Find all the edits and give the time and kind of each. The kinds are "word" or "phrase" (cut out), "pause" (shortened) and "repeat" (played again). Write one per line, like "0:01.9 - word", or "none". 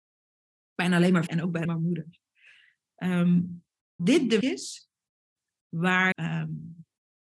0:01.3 - word
0:01.6 - word
0:04.0 - word
0:04.4 - word
0:06.1 - word